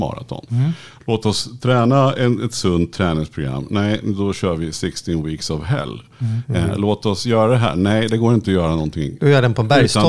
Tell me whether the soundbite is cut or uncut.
uncut